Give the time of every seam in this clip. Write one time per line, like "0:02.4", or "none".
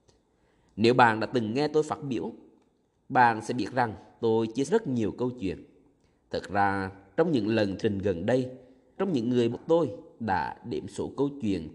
0:04.7
0:07.8
0:09.0
0:09.5